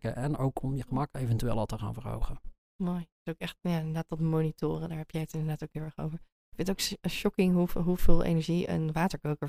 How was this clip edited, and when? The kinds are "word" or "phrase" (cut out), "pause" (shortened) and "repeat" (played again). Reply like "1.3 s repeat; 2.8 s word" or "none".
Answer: none